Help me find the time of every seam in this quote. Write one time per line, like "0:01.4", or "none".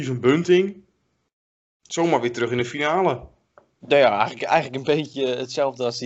none